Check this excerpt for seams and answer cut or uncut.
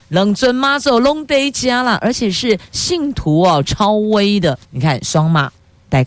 cut